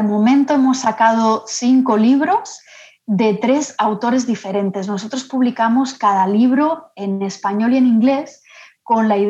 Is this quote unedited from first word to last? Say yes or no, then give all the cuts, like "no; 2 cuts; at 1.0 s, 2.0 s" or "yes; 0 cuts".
yes; 0 cuts